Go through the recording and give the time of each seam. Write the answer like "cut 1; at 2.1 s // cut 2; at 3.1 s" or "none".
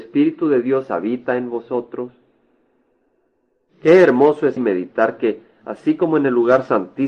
cut 1; at 4.6 s